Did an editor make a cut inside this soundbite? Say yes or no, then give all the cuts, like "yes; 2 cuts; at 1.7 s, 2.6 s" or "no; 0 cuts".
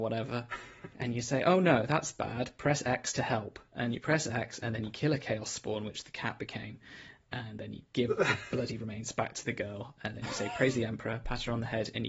no; 0 cuts